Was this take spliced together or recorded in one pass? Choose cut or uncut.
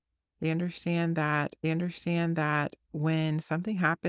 cut